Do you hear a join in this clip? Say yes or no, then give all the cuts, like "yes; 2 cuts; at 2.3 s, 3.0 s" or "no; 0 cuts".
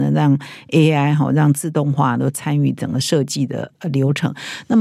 no; 0 cuts